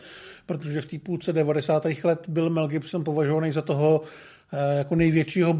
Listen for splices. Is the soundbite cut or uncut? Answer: uncut